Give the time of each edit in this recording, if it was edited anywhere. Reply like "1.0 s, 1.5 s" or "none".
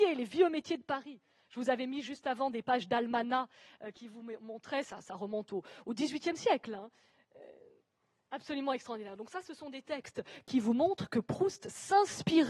none